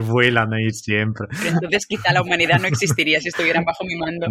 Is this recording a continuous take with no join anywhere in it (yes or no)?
yes